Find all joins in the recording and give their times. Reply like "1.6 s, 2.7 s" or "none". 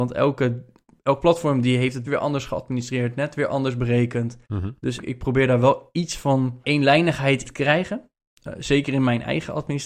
2.0 s, 4.4 s, 5.0 s, 7.4 s